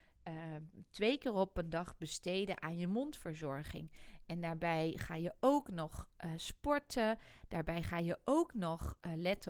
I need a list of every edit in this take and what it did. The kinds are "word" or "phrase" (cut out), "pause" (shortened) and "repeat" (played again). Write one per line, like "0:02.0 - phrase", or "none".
none